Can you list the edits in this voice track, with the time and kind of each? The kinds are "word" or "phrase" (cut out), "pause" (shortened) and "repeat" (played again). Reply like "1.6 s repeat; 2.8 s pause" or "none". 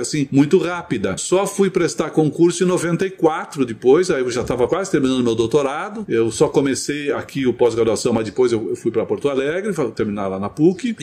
none

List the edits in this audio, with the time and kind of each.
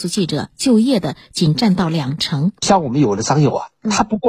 2.6 s pause

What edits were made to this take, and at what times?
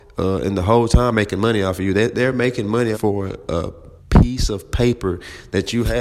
1.1 s word; 2.9 s phrase; 4.0 s pause

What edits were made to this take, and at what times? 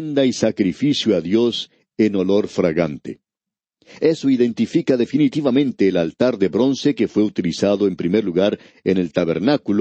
none

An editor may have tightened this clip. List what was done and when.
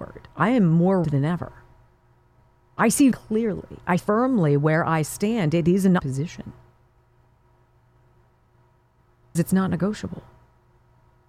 1.0 s word; 3.1 s word; 4.0 s word; 6.0 s word; 9.3 s word

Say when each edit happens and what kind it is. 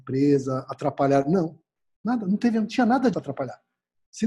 3.1 s word

